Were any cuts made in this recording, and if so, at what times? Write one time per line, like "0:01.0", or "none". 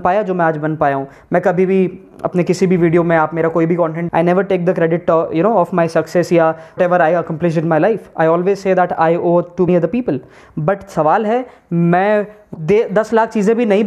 0:04.1
0:06.8
0:09.7
0:12.5